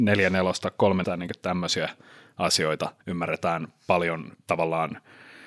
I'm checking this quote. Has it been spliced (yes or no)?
yes